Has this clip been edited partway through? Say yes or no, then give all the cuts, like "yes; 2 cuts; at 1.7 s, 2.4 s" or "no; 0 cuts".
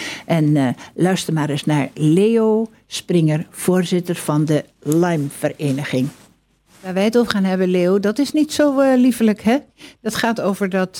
no; 0 cuts